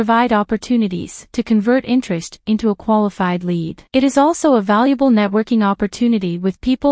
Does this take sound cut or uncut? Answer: cut